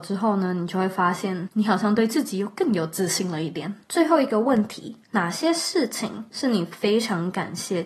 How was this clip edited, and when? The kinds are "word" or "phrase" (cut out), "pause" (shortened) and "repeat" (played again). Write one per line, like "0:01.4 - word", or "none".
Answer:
0:03.8 - pause
0:05.0 - pause
0:06.3 - pause